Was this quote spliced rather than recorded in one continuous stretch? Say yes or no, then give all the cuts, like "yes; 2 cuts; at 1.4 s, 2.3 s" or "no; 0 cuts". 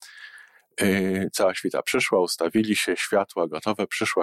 no; 0 cuts